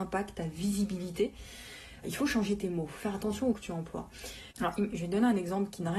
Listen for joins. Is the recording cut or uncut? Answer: cut